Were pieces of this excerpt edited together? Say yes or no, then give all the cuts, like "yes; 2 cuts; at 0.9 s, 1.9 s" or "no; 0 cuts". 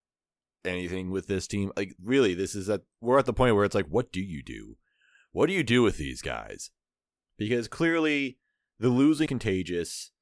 yes; 2 cuts; at 2.0 s, 9.3 s